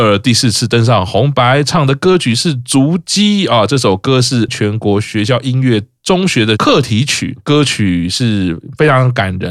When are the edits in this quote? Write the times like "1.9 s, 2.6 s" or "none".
4.5 s